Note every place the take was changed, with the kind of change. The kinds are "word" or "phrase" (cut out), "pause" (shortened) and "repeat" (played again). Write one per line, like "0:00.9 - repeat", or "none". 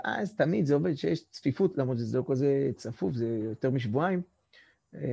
none